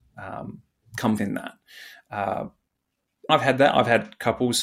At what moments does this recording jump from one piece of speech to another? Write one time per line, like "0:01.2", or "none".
0:01.2
0:03.3